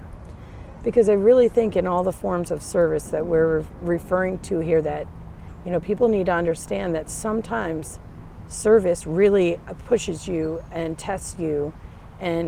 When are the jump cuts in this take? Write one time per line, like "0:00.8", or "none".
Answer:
none